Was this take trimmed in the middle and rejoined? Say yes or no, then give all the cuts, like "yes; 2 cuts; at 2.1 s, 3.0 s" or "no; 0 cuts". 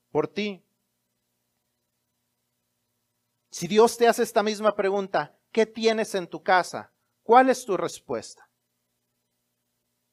no; 0 cuts